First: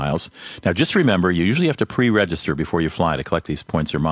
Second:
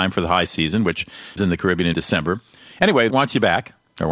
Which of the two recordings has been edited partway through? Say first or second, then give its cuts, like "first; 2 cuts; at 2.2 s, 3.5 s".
second; 3 cuts; at 1.4 s, 1.9 s, 3.1 s